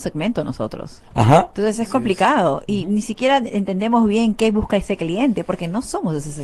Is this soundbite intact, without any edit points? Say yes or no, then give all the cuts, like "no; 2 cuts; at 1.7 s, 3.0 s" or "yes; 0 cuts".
yes; 0 cuts